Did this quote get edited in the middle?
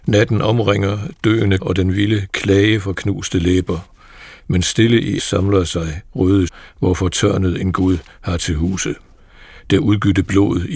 yes; 3 cuts; at 1.6 s, 5.2 s, 6.5 s

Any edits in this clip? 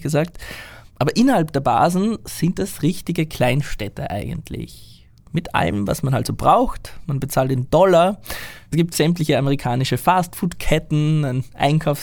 no; 0 cuts

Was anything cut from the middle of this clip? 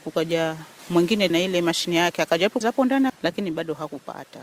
yes; 3 cuts; at 1.3 s, 2.6 s, 3.1 s

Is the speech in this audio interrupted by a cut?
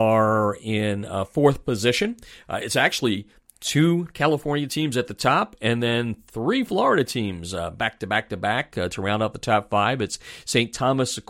no; 0 cuts

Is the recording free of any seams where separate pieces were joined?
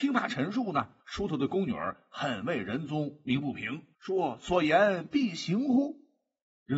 no; 2 cuts; at 1.0 s, 3.9 s

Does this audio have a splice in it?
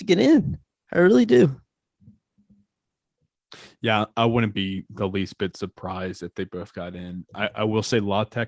no; 0 cuts

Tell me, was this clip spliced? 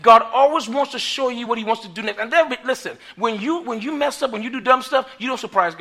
no; 0 cuts

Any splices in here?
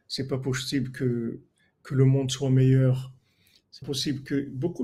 yes; 1 cut; at 3.8 s

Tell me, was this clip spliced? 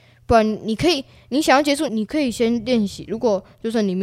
yes; 1 cut; at 1.9 s

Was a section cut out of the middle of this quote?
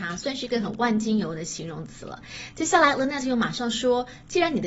no; 0 cuts

